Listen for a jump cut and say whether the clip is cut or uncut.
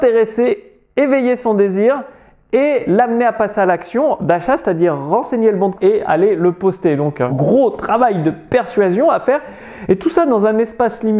cut